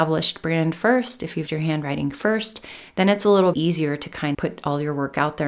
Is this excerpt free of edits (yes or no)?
no